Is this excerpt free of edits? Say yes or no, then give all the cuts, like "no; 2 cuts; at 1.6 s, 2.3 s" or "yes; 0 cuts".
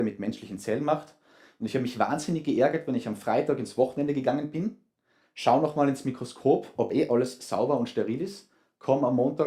yes; 0 cuts